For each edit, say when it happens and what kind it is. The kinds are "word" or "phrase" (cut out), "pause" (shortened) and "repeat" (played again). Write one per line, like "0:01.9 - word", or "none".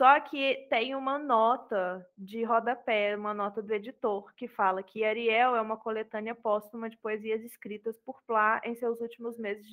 none

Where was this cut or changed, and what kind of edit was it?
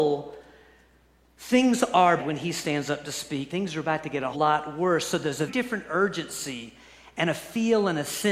0:02.2 - word
0:03.5 - word
0:04.3 - word
0:05.5 - word

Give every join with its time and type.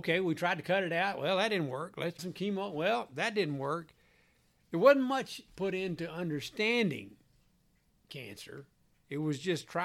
0:02.2 - word
0:05.5 - word

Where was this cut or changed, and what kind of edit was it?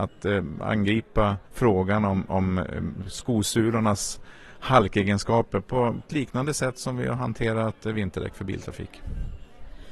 0:01.5 - pause
0:06.0 - phrase

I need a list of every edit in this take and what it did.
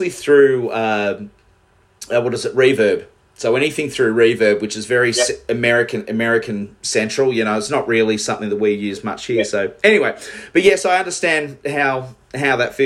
none

